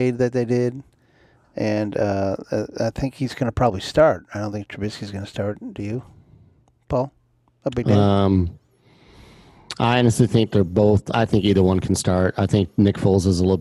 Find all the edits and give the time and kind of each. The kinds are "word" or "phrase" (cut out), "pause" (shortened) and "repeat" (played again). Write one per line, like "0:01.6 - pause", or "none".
none